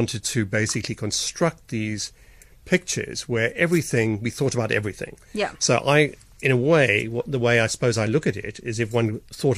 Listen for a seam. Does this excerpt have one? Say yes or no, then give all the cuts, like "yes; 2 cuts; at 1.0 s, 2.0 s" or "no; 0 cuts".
no; 0 cuts